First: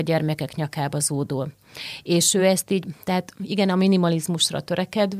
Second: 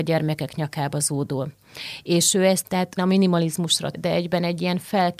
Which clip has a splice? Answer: second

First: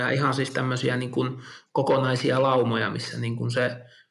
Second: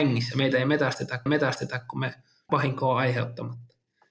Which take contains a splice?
second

